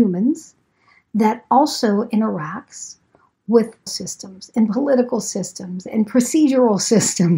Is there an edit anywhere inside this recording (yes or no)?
yes